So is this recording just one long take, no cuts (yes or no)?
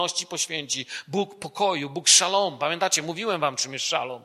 yes